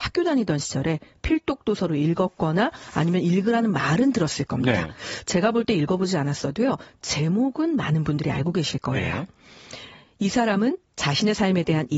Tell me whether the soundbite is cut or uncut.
uncut